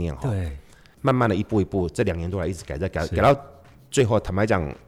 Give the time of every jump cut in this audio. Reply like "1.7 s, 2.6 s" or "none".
none